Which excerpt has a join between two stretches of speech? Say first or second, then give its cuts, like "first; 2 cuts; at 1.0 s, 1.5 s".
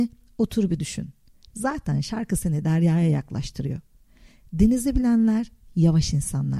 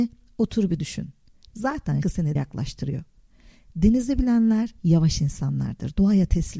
second; 3 cuts; at 2.0 s, 2.4 s, 4.8 s